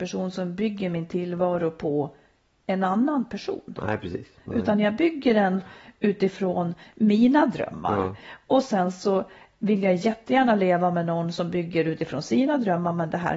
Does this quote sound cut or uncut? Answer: uncut